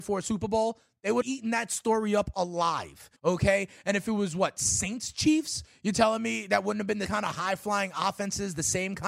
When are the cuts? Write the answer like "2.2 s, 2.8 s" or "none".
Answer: 1.2 s, 3.2 s, 7.1 s